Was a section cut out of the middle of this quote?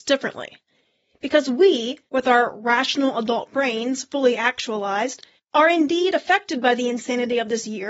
yes; 2 cuts; at 2.1 s, 5.4 s

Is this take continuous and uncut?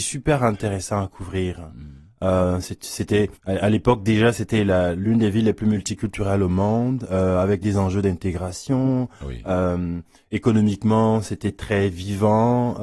no; 1 cut; at 3.4 s

